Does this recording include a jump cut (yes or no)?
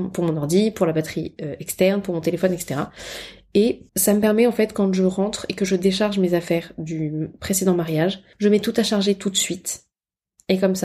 yes